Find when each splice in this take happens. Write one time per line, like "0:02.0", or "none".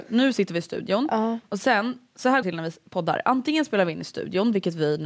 0:02.4